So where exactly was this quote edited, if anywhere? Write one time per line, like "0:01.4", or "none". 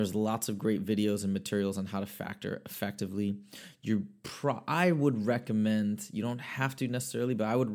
none